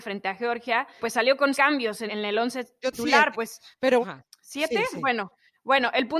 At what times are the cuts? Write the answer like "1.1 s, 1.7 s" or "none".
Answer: 1.0 s, 1.5 s, 2.1 s, 2.9 s, 3.3 s, 4.0 s